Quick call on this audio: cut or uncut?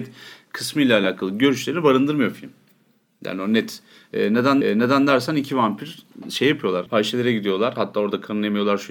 cut